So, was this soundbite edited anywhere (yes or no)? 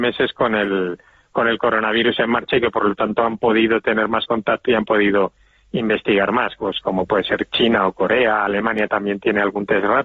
no